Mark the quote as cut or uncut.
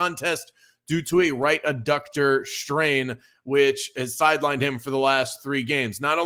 uncut